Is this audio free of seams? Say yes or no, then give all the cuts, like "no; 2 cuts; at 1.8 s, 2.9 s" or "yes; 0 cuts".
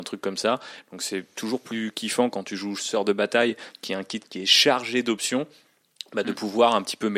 yes; 0 cuts